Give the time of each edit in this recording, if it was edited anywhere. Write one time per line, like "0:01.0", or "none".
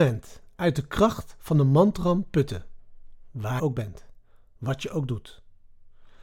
0:03.6